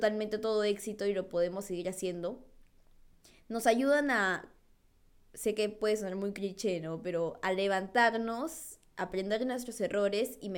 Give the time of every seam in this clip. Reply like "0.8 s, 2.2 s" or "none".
none